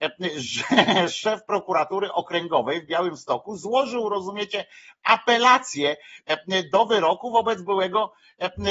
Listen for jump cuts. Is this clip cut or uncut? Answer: uncut